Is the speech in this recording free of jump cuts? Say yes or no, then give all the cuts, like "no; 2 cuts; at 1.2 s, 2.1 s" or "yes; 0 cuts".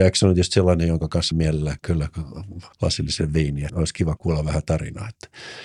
no; 5 cuts; at 1.3 s, 1.8 s, 2.7 s, 3.7 s, 4.2 s